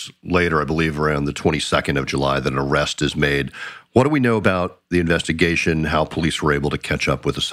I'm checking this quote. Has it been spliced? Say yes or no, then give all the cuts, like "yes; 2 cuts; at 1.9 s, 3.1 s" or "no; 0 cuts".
no; 0 cuts